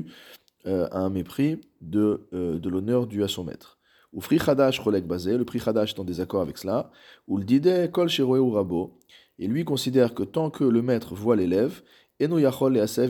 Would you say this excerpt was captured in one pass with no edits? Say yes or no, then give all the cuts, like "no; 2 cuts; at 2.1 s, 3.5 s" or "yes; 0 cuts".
yes; 0 cuts